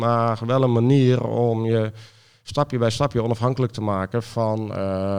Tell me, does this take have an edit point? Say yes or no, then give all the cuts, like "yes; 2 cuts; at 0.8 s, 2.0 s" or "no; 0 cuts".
no; 0 cuts